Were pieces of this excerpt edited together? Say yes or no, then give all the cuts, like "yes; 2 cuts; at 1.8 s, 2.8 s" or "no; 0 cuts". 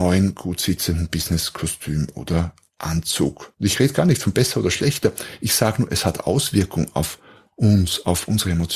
yes; 1 cut; at 3.5 s